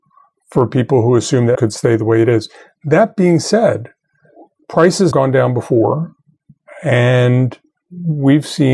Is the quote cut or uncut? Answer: cut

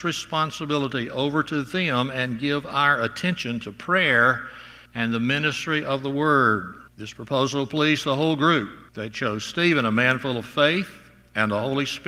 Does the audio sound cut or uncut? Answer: cut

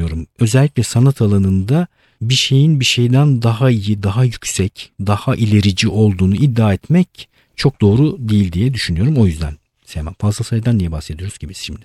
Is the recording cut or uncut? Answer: uncut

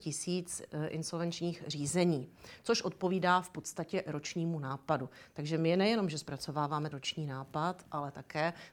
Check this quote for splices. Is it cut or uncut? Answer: cut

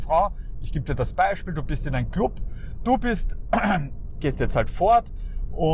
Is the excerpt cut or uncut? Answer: uncut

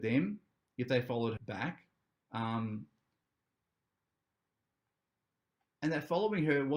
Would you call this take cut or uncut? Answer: cut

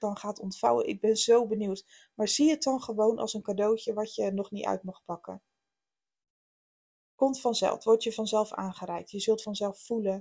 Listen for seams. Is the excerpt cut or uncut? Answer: uncut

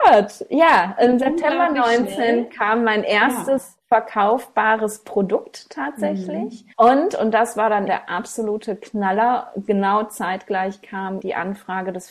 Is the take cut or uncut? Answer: cut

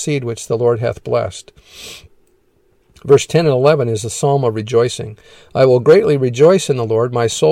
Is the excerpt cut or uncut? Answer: uncut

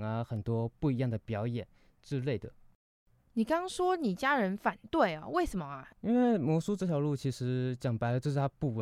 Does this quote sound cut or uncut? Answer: cut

